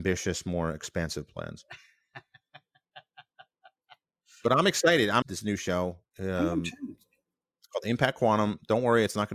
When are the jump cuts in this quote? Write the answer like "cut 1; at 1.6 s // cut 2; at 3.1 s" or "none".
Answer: cut 1; at 5.2 s